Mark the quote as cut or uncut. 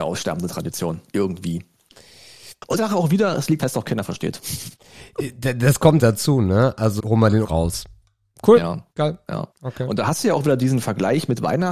cut